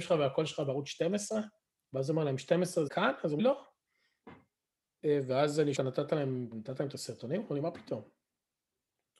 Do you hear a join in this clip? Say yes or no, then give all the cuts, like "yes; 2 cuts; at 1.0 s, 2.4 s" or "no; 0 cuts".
yes; 5 cuts; at 1.7 s, 2.9 s, 3.4 s, 5.8 s, 6.5 s